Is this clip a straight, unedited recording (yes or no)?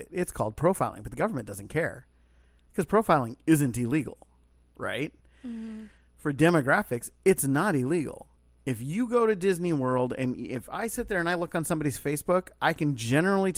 yes